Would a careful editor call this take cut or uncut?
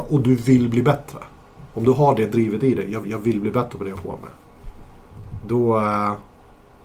cut